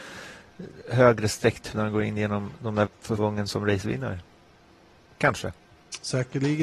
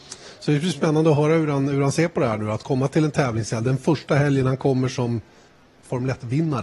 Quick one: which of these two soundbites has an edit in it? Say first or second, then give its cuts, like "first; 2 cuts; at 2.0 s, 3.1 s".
first; 3 cuts; at 1.7 s, 2.9 s, 3.2 s